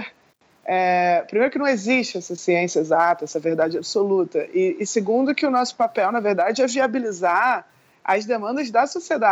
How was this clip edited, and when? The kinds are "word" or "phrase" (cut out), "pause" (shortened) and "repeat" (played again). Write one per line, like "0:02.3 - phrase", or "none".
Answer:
none